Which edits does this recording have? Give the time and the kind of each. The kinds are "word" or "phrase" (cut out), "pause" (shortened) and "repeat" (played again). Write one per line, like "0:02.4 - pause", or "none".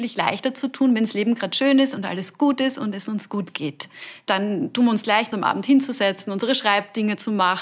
0:05.3 - word